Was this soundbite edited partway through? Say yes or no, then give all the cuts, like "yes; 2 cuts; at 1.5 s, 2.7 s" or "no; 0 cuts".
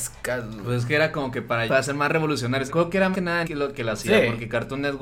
yes; 4 cuts; at 1.7 s, 2.7 s, 3.1 s, 3.4 s